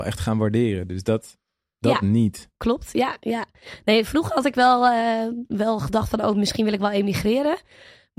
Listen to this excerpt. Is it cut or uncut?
uncut